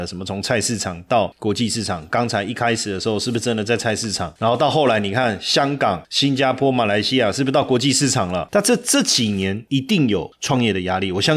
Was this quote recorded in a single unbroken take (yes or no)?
yes